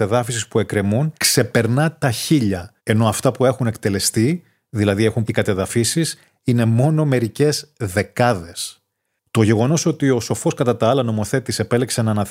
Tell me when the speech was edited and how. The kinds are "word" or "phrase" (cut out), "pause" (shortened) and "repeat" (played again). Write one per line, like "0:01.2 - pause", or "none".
0:01.2 - pause
0:02.8 - pause
0:05.2 - word